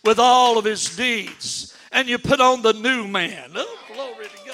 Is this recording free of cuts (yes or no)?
yes